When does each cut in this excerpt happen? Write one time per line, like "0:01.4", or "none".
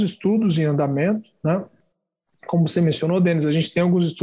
none